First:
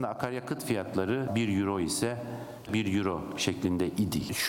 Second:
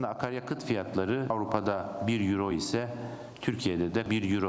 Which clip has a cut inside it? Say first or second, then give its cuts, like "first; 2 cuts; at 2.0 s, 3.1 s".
first; 2 cuts; at 1.3 s, 2.7 s